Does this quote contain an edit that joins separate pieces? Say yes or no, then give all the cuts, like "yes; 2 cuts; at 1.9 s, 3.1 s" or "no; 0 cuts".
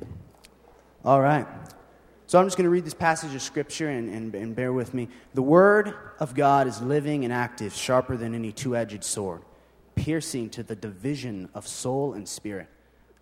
no; 0 cuts